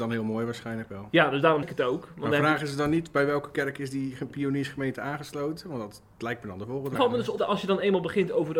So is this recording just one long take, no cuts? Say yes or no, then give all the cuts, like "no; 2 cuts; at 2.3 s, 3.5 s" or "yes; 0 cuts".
no; 3 cuts; at 1.6 s, 7.0 s, 7.4 s